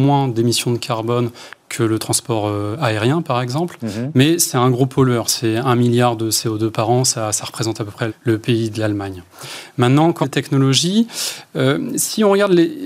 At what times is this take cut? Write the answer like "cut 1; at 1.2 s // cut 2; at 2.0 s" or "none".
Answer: cut 1; at 8.1 s // cut 2; at 10.2 s

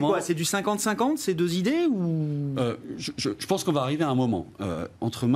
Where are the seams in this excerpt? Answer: none

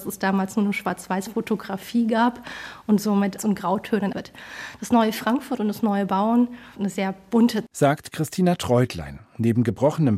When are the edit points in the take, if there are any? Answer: cut 1; at 3.4 s // cut 2; at 4.1 s // cut 3; at 6.8 s // cut 4; at 7.7 s

